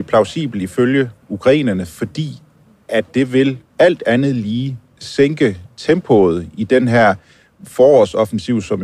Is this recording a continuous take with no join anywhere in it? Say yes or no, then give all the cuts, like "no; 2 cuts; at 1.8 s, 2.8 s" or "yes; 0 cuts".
yes; 0 cuts